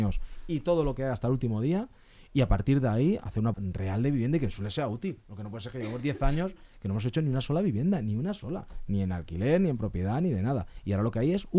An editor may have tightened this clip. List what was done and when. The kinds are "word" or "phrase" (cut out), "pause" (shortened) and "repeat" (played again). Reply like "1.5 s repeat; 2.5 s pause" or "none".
3.5 s word